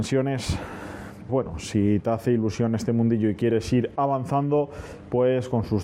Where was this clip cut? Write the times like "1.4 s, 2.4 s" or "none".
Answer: 1.3 s